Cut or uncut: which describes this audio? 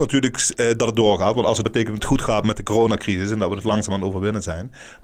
cut